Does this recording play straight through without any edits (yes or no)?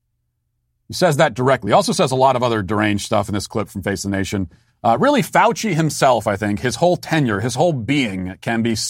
yes